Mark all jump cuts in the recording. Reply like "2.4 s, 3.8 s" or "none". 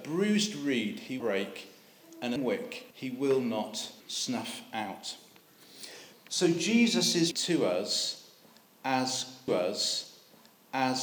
1.2 s, 2.4 s, 2.9 s, 4.0 s, 6.1 s, 7.3 s, 9.5 s